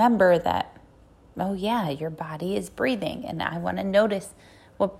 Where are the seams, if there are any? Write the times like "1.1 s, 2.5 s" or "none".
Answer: none

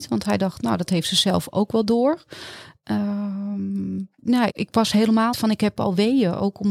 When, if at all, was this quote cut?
4.2 s, 4.5 s, 5.3 s

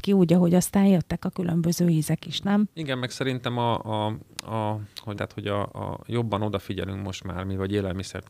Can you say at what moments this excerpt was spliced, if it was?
4.3 s, 5.1 s

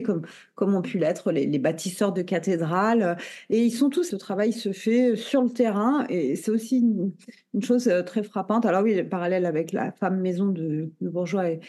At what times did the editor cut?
3.5 s, 4.1 s

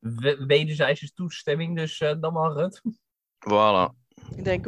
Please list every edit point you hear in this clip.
none

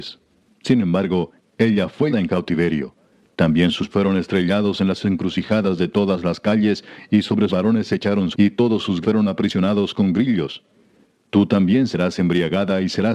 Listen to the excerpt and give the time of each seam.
2.1 s, 3.9 s, 7.5 s, 8.3 s, 9.0 s

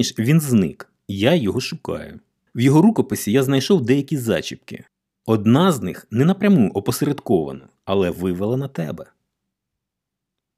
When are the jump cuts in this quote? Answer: none

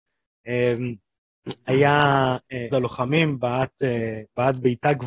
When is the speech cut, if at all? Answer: 2.7 s

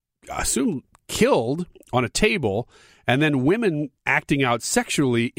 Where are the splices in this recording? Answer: 4.0 s

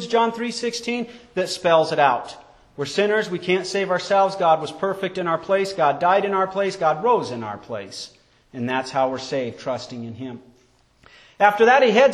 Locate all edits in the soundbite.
none

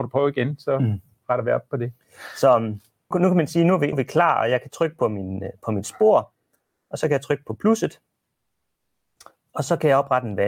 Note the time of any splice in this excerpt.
3.1 s, 3.9 s

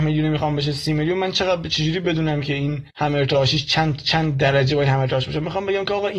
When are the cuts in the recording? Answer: 2.9 s

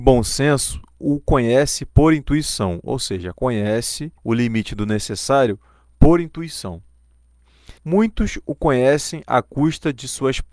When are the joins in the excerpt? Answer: 4.2 s, 7.8 s

